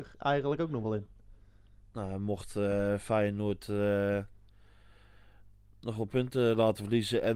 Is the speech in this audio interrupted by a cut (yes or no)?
no